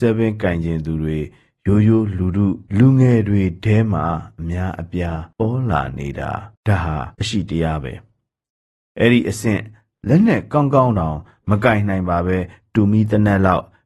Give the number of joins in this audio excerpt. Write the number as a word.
four